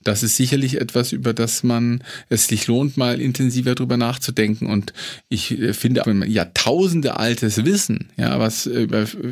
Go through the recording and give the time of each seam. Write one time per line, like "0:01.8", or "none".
0:06.0

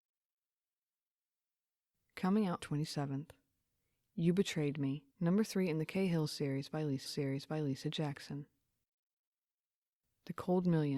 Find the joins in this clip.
0:02.6
0:05.1
0:07.1

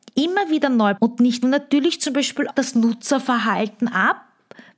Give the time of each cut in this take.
0:01.0
0:01.4
0:02.5

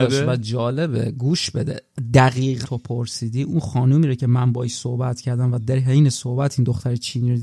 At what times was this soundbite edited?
0:02.6

